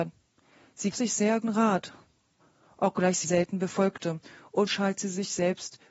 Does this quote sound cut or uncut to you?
cut